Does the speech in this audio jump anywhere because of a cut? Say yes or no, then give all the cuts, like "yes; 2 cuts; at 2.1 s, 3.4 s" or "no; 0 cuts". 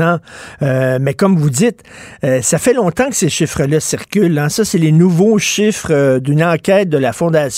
no; 0 cuts